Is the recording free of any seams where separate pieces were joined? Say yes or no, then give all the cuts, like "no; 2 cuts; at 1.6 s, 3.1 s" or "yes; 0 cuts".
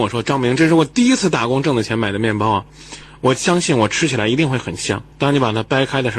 no; 1 cut; at 5.1 s